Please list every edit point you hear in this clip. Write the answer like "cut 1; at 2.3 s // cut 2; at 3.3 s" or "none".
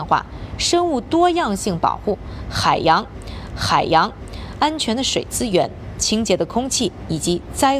cut 1; at 3.5 s